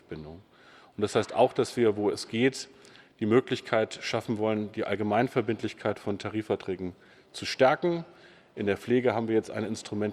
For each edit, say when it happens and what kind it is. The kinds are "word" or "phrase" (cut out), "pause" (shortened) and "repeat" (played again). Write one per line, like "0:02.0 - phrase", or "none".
none